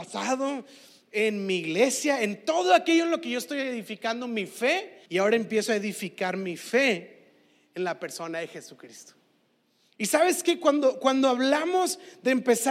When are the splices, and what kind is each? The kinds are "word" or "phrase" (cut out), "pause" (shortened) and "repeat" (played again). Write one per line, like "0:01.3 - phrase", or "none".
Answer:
0:05.1 - pause